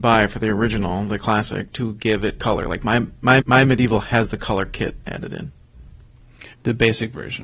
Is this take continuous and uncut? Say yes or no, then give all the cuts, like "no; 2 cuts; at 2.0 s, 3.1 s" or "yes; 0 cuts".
no; 2 cuts; at 3.4 s, 6.5 s